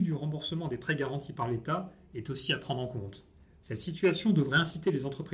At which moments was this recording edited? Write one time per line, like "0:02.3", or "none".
0:03.4